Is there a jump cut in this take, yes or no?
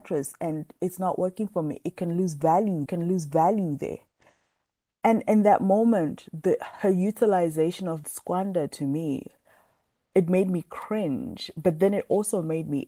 yes